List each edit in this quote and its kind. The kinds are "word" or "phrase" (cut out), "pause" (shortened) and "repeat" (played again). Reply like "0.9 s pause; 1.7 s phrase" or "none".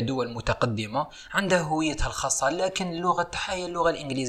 none